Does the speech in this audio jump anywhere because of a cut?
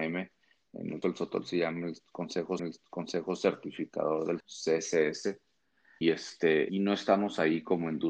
yes; 5 cuts; at 1.0 s, 2.6 s, 4.4 s, 6.0 s, 6.7 s

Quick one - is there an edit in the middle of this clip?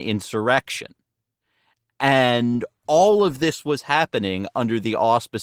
no; 0 cuts

